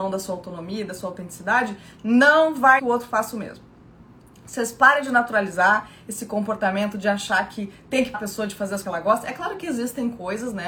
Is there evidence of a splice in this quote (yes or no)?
yes